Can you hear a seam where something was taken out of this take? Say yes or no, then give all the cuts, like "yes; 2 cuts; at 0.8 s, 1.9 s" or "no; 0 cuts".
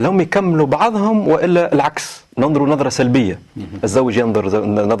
yes; 2 cuts; at 2.3 s, 3.5 s